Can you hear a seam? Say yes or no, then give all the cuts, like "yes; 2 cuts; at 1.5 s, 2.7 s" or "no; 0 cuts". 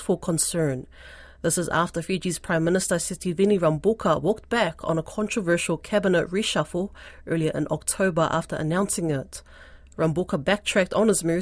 no; 0 cuts